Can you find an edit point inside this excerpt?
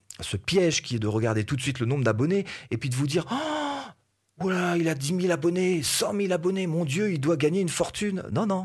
no; 0 cuts

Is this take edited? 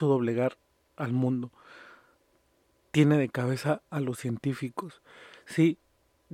no; 0 cuts

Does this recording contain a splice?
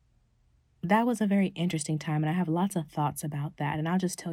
no; 0 cuts

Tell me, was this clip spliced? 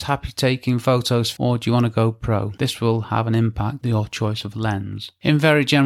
yes; 2 cuts; at 1.4 s, 3.8 s

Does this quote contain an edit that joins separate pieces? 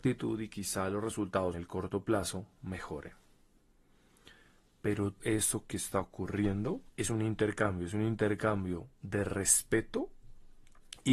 yes; 3 cuts; at 1.5 s, 5.2 s, 6.9 s

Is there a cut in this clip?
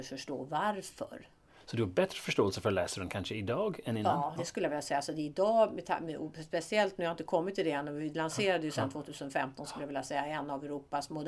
yes; 1 cut; at 4.4 s

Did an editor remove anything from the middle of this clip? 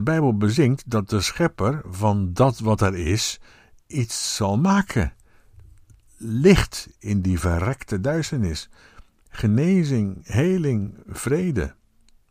no; 0 cuts

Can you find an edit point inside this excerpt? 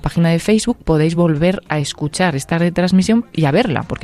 no; 0 cuts

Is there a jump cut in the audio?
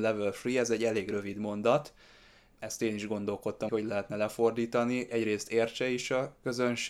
yes; 2 cuts; at 3.7 s, 5.1 s

